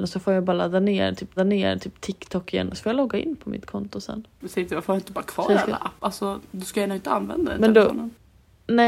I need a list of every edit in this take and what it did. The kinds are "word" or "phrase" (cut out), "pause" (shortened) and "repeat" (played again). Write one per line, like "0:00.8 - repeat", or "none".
0:01.4 - repeat